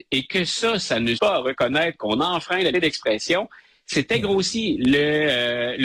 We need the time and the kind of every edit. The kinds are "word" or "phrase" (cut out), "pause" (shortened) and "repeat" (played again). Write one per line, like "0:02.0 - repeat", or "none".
0:01.2 - word
0:02.7 - word